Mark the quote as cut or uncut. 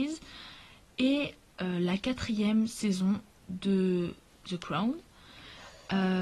uncut